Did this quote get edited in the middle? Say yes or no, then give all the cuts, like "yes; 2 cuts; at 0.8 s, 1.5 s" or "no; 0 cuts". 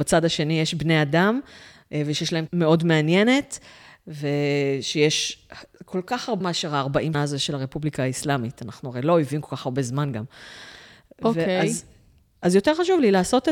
yes; 3 cuts; at 2.5 s, 6.4 s, 7.1 s